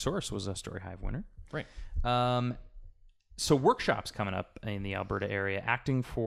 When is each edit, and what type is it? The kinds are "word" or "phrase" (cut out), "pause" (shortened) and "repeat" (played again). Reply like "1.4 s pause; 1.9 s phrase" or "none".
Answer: none